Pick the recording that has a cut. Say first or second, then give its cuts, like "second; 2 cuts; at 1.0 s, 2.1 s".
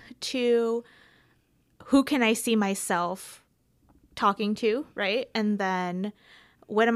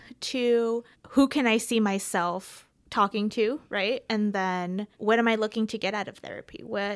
second; 3 cuts; at 0.9 s, 2.8 s, 4.9 s